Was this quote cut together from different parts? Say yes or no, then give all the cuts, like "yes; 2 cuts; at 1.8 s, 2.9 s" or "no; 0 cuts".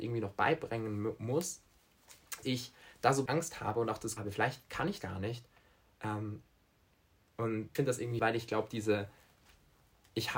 yes; 6 cuts; at 2.4 s, 3.3 s, 4.2 s, 5.0 s, 7.7 s, 8.2 s